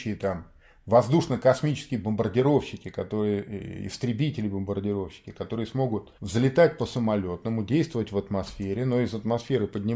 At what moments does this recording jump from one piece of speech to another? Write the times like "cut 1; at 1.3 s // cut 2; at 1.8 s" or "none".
cut 1; at 6.2 s